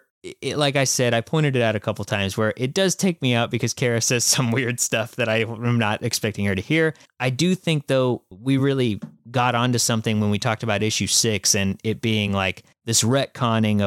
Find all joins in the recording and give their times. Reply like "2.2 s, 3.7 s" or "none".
none